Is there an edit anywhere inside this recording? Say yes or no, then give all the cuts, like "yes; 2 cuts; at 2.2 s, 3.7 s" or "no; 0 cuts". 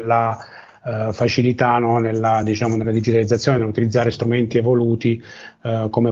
no; 0 cuts